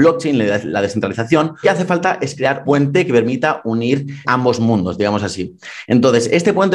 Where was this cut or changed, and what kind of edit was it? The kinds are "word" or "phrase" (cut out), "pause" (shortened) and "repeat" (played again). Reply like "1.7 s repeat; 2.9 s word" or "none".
1.6 s word; 2.6 s word; 4.2 s word